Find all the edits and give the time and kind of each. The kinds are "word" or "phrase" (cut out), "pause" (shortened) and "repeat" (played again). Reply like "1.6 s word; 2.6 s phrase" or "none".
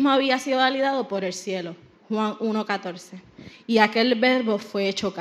none